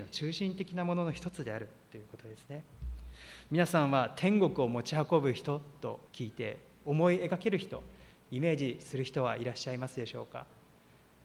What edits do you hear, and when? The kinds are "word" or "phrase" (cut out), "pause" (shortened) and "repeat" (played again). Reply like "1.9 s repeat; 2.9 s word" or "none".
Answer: 6.1 s pause